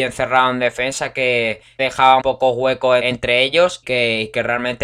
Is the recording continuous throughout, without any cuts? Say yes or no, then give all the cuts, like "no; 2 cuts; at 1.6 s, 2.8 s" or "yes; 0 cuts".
no; 4 cuts; at 1.8 s, 2.2 s, 3.0 s, 3.8 s